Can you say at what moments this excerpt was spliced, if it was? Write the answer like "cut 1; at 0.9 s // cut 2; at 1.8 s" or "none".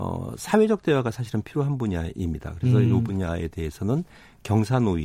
none